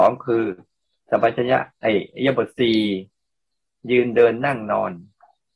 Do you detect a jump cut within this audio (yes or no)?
no